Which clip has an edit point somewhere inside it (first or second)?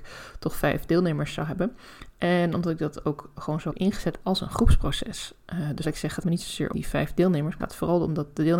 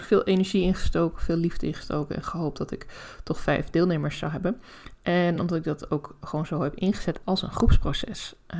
first